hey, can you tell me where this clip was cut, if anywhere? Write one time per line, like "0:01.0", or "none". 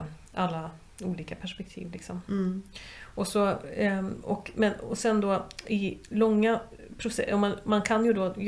none